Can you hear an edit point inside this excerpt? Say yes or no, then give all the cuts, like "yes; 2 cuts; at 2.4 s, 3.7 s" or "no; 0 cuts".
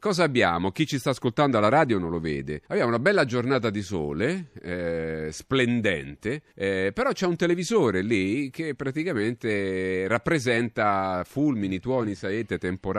yes; 2 cuts; at 2.6 s, 6.5 s